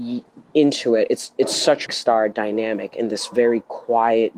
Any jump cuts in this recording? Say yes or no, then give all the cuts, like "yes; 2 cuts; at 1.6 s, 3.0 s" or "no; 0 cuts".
yes; 1 cut; at 1.9 s